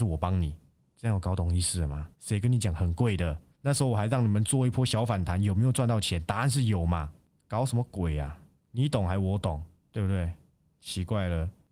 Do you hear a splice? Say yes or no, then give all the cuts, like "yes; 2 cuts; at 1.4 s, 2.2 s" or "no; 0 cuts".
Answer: yes; 2 cuts; at 2.1 s, 3.5 s